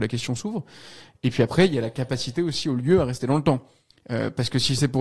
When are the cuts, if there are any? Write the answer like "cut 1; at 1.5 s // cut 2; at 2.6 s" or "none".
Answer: none